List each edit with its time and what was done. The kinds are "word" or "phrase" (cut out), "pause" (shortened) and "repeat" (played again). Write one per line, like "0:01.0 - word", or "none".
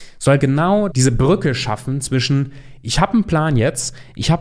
0:00.9 - word